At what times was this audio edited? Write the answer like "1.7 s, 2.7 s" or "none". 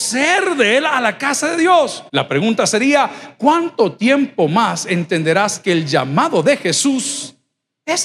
2.1 s